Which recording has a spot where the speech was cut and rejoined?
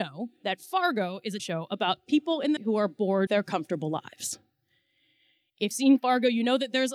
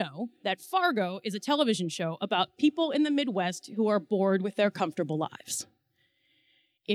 first; 4 cuts; at 1.4 s, 2.6 s, 3.3 s, 5.7 s

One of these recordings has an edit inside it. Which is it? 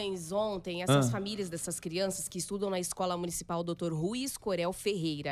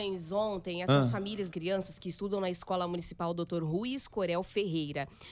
second; 1 cut; at 1.5 s

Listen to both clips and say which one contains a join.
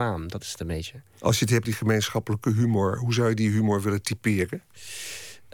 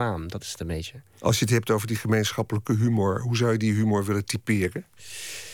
first; 1 cut; at 1.6 s

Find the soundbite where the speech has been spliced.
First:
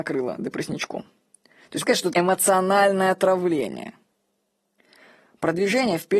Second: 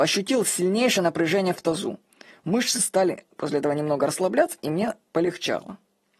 first; 2 cuts; at 1.8 s, 2.1 s

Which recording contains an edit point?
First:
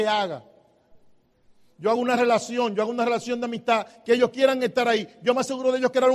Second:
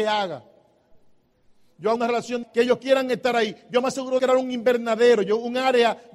second; 3 cuts; at 2.0 s, 2.4 s, 4.2 s

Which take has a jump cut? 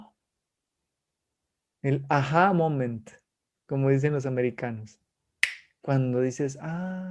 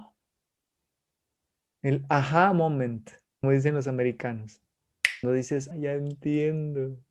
second; 3 cuts; at 3.4 s, 5.2 s, 5.7 s

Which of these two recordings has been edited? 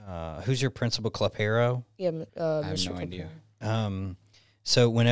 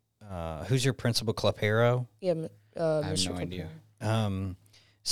first; 1 cut; at 2.3 s

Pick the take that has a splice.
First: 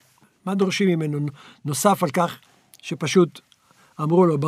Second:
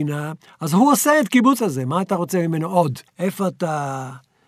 second; 2 cuts; at 1.6 s, 3.1 s

